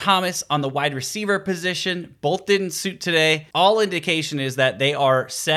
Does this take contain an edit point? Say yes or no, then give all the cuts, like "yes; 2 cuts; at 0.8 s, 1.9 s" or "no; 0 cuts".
no; 0 cuts